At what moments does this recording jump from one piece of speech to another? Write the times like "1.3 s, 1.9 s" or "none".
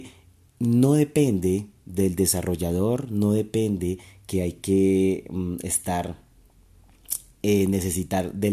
none